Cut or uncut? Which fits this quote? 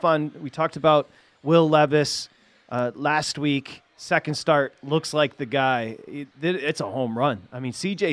uncut